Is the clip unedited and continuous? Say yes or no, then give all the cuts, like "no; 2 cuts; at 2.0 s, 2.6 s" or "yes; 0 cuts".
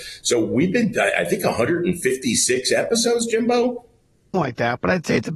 no; 1 cut; at 4.3 s